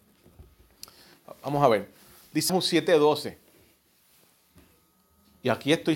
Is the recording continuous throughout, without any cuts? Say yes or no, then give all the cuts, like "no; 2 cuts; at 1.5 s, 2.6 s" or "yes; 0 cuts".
no; 1 cut; at 2.5 s